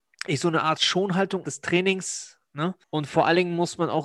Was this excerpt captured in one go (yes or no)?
no